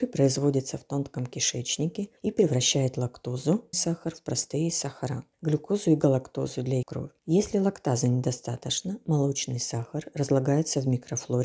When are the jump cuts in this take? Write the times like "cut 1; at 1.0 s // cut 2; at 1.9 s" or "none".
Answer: cut 1; at 2.2 s // cut 2; at 3.7 s // cut 3; at 5.3 s // cut 4; at 6.8 s // cut 5; at 7.2 s